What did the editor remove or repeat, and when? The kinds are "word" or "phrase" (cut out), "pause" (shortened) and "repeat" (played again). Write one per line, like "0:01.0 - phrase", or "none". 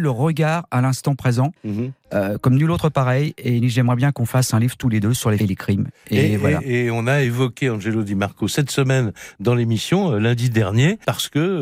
0:01.6 - pause
0:05.4 - phrase